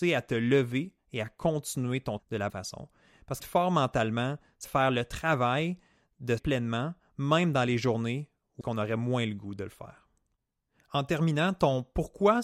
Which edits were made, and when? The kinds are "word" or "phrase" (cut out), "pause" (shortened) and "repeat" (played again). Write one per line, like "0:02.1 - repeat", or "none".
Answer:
0:02.2 - word
0:02.5 - word
0:03.4 - word
0:04.6 - word
0:06.4 - word
0:08.6 - word